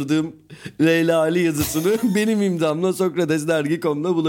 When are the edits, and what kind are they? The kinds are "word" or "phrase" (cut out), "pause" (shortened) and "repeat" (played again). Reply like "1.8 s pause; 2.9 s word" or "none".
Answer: none